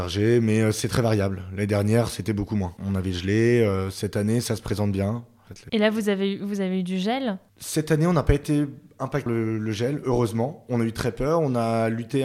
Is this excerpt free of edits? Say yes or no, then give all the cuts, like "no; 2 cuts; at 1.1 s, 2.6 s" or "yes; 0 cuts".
no; 3 cuts; at 2.8 s, 7.5 s, 9.3 s